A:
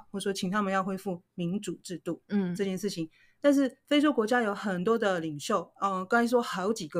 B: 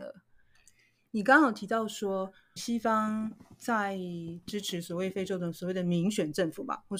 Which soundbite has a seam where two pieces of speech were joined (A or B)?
B